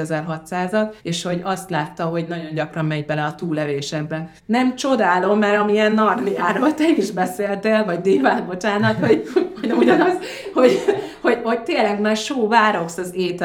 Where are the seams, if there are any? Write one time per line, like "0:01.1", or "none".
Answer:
0:01.0
0:04.4